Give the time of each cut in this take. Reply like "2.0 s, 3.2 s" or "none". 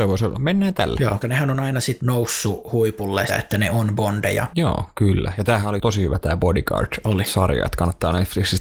1.2 s, 2.0 s, 3.3 s